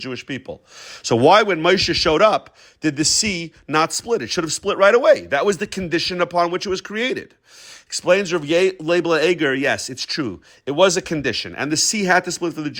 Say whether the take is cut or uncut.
uncut